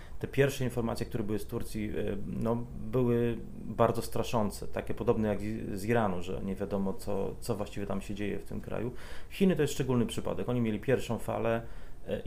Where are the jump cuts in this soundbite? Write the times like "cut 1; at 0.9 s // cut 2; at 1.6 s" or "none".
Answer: none